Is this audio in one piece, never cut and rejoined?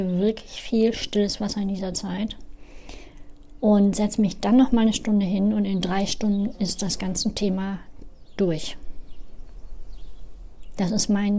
yes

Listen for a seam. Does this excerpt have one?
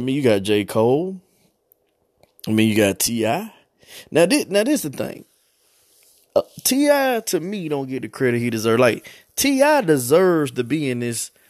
no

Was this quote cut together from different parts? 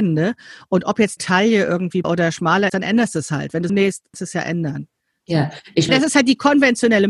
yes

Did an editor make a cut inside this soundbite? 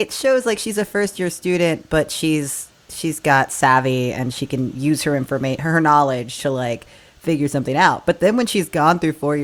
no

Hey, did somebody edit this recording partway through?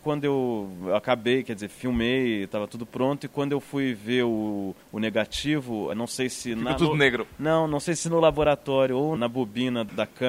yes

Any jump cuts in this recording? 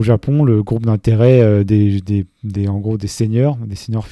no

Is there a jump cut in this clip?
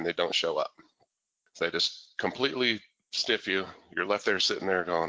no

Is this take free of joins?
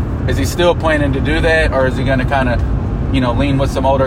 yes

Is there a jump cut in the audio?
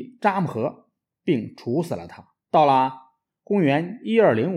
yes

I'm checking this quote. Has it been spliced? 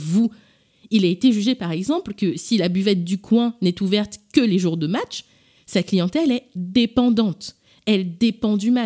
no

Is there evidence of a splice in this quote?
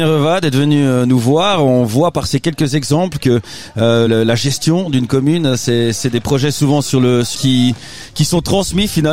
yes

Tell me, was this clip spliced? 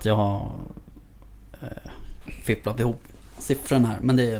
no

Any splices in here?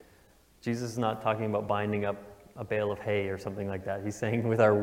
no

